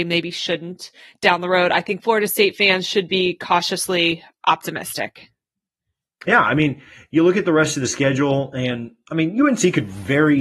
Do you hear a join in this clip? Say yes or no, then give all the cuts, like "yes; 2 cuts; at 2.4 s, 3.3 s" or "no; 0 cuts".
no; 0 cuts